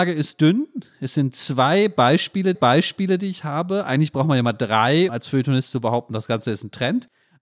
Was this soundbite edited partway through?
yes; 2 cuts; at 2.5 s, 5.1 s

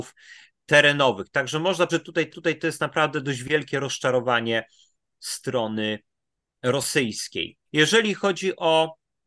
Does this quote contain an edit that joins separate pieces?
yes; 4 cuts; at 1.9 s, 2.3 s, 5.1 s, 7.7 s

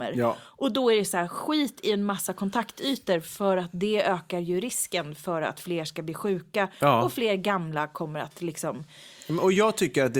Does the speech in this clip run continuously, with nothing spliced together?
yes; 0 cuts

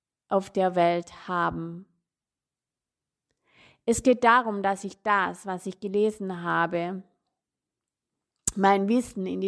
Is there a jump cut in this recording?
no; 0 cuts

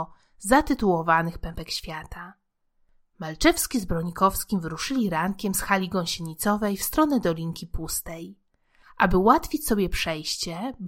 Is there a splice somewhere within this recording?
no; 0 cuts

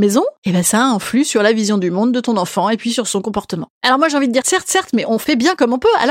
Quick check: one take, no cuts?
no; 1 cut; at 4.4 s

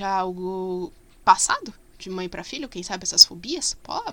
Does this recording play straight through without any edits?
yes; 0 cuts

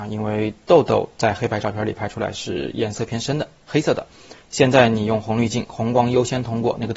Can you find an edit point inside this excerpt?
no; 0 cuts

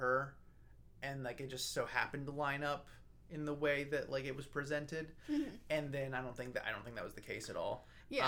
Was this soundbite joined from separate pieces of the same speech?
no; 0 cuts

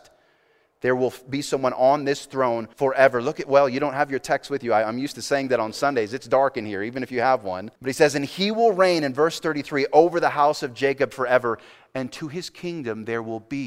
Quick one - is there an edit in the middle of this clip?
yes; 2 cuts; at 2.7 s, 7.8 s

